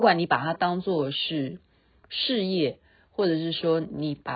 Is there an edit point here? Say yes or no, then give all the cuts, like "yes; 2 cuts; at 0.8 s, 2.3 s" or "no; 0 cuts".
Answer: no; 0 cuts